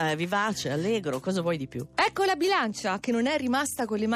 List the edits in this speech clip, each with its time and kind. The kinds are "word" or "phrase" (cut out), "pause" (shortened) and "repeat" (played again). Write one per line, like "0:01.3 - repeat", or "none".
none